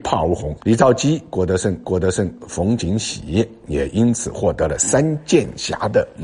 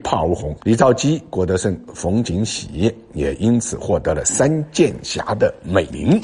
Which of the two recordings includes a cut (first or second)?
first